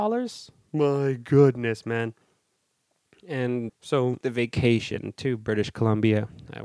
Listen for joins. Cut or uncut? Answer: cut